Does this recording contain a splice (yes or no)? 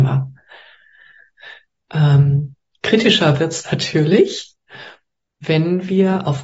no